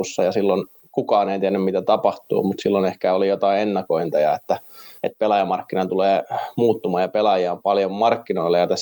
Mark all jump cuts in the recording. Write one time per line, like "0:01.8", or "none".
0:05.0